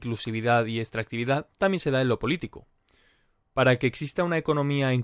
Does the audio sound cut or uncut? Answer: uncut